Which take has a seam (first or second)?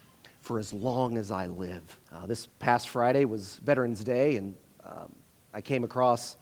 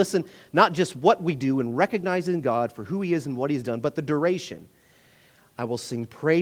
first